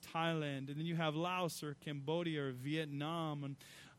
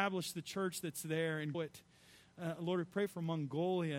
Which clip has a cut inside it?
second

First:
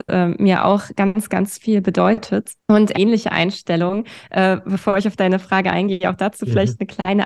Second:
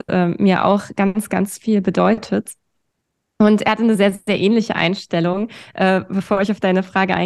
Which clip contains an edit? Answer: first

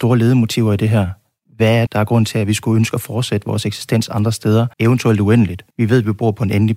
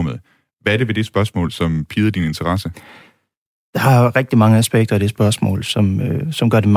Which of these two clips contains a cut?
first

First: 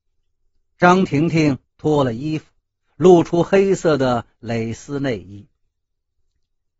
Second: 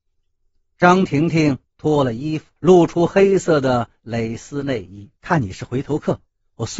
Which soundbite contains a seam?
second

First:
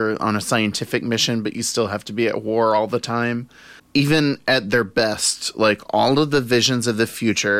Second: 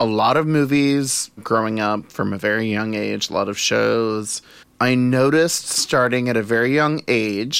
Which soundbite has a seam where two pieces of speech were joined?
second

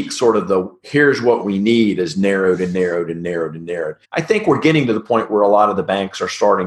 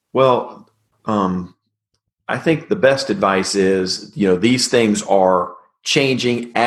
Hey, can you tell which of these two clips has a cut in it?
first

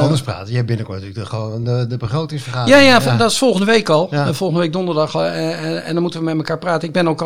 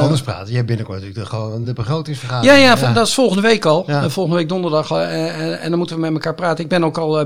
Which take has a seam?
second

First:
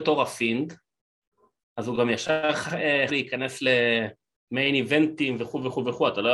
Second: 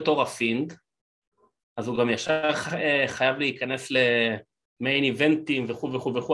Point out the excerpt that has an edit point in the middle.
first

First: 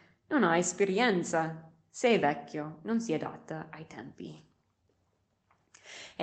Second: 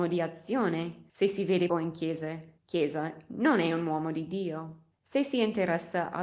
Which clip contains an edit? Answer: second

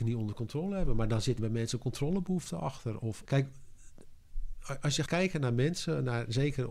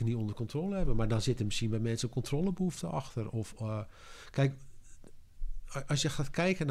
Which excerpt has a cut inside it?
first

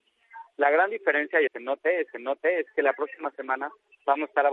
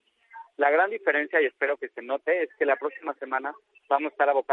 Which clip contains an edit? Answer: first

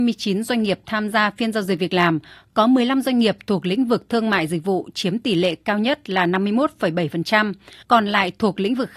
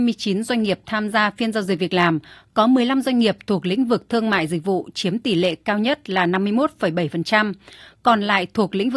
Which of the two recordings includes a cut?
first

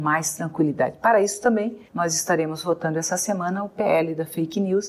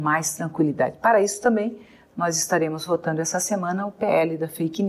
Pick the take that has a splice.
first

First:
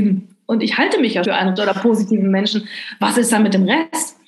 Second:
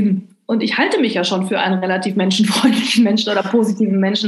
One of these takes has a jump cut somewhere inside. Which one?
first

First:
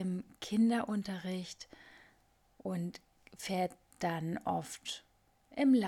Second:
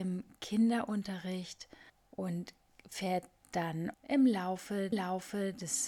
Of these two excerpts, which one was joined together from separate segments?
second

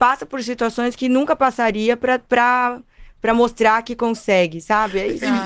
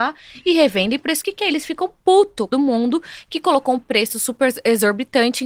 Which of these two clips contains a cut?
second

